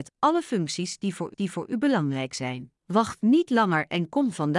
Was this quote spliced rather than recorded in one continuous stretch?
yes; 2 cuts; at 1.3 s, 2.8 s

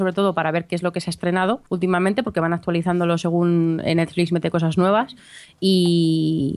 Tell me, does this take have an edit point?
yes; 1 cut; at 1.7 s

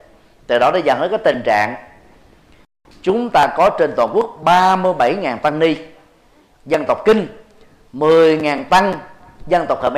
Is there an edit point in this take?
no; 0 cuts

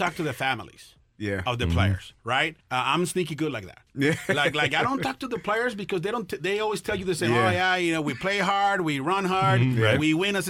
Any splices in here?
yes; 1 cut; at 2.6 s

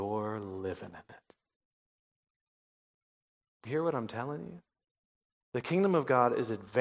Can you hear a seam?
yes; 1 cut; at 3.6 s

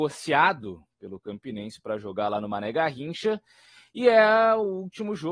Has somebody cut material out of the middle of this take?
no; 0 cuts

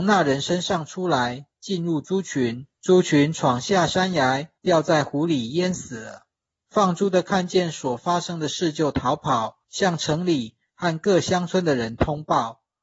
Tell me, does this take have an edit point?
yes; 4 cuts; at 2.7 s, 4.6 s, 6.5 s, 9.6 s

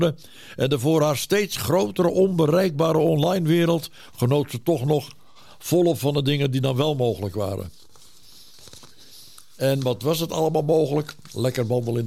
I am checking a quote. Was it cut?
no; 0 cuts

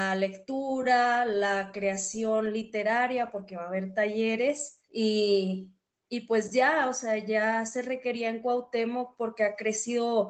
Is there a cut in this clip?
yes; 1 cut; at 4.8 s

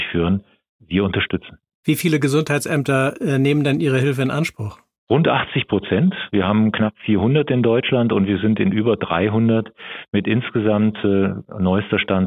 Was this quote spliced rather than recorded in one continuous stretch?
no; 0 cuts

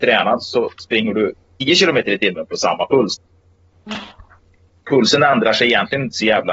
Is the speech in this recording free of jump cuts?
yes; 0 cuts

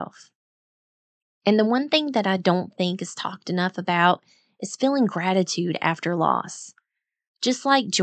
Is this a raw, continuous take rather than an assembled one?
yes; 0 cuts

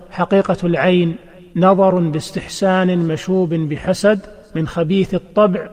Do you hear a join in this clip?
no; 0 cuts

